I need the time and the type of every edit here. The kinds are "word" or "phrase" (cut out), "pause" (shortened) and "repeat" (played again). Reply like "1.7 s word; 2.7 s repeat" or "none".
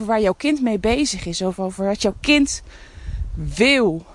none